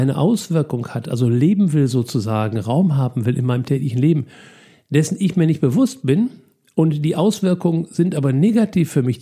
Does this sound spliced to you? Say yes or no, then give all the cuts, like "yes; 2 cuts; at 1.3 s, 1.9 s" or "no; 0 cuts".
no; 0 cuts